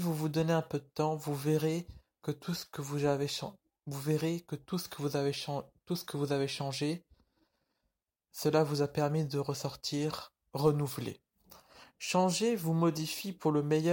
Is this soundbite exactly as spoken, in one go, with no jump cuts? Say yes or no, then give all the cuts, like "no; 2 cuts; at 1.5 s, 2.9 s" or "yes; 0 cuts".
yes; 0 cuts